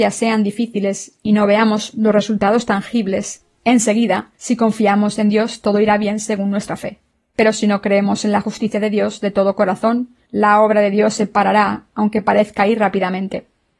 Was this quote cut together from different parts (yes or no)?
yes